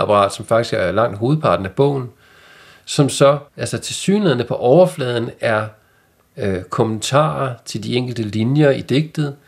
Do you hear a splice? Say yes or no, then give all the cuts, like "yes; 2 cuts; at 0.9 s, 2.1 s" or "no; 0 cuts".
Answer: yes; 1 cut; at 3.5 s